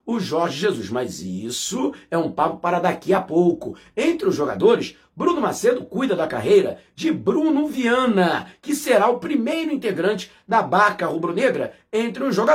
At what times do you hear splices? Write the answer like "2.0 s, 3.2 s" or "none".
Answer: none

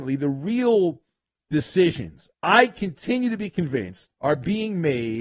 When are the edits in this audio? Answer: 2.3 s, 4.1 s

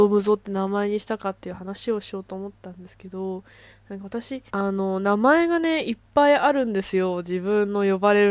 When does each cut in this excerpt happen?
4.5 s

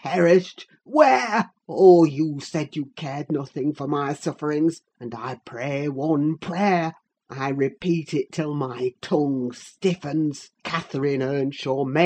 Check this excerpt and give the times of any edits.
1.6 s, 4.9 s, 7.1 s, 10.5 s

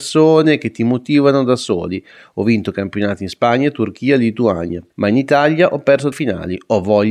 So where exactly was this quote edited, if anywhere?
4.9 s, 6.1 s

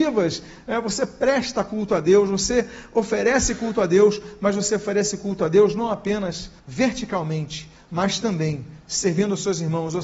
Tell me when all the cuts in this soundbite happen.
6.6 s

